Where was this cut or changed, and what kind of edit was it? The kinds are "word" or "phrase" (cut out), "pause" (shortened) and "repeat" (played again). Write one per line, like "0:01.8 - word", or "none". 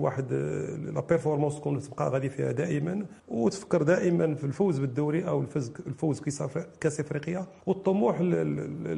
0:03.2 - pause
0:07.6 - pause